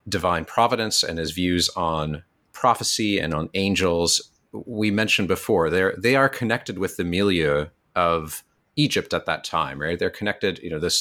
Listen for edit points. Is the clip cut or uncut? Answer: uncut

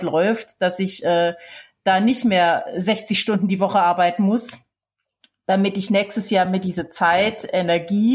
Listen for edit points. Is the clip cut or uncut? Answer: uncut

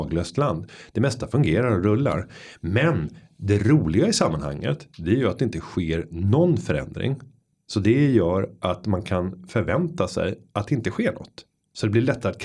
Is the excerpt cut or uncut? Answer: uncut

